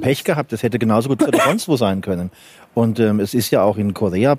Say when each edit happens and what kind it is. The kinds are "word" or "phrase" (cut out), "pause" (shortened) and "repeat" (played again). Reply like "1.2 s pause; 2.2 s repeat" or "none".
1.2 s word